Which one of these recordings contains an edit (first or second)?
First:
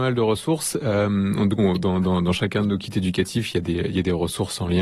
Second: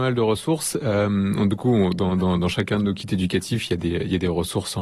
first